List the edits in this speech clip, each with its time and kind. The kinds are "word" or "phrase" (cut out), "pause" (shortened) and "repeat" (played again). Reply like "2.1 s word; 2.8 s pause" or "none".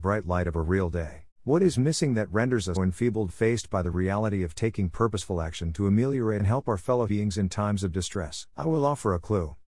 1.3 s pause; 2.8 s word; 3.3 s word; 6.4 s phrase; 7.1 s word; 8.5 s pause